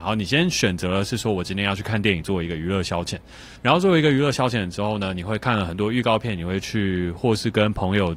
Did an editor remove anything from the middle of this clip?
yes; 1 cut; at 3.6 s

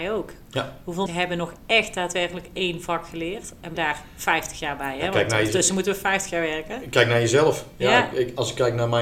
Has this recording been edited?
yes; 2 cuts; at 1.1 s, 3.7 s

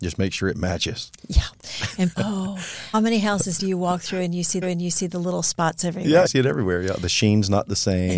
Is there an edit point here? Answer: yes; 6 cuts; at 1.2 s, 2.1 s, 2.9 s, 3.6 s, 4.6 s, 6.3 s

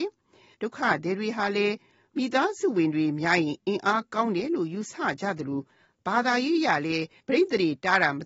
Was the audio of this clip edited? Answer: no; 0 cuts

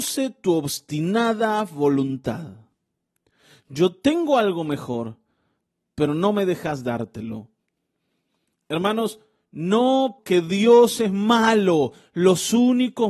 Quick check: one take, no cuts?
no; 1 cut; at 10.2 s

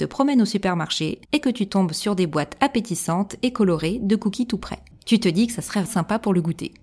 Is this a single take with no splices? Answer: no; 3 cuts; at 1.2 s, 4.9 s, 5.9 s

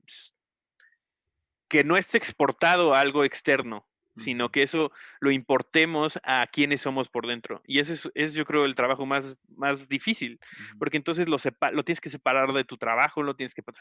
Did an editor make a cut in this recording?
no; 0 cuts

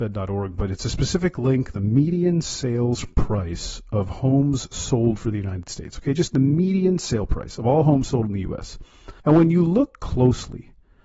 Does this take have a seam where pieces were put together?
yes; 2 cuts; at 1.7 s, 9.2 s

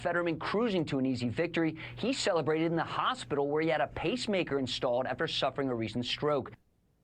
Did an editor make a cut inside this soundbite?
no; 0 cuts

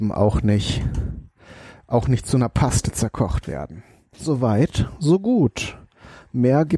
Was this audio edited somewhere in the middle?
no; 0 cuts

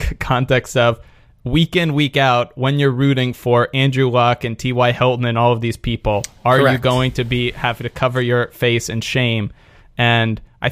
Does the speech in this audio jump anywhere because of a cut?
no; 0 cuts

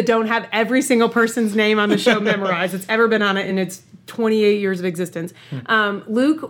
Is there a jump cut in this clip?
no; 0 cuts

